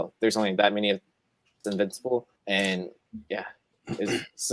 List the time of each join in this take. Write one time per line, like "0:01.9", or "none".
0:01.6
0:02.4